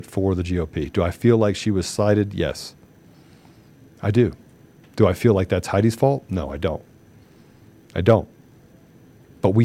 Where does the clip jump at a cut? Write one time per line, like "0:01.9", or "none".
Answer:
none